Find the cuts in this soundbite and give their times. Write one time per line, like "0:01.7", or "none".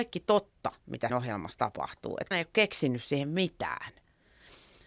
0:01.1
0:02.3